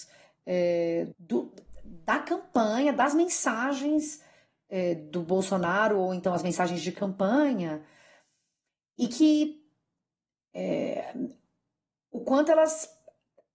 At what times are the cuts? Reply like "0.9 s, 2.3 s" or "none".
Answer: 1.1 s